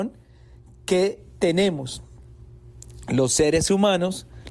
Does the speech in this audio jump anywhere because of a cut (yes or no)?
no